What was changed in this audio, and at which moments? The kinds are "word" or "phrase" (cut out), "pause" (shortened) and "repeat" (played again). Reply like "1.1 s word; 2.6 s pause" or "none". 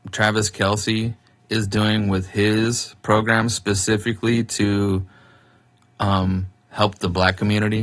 none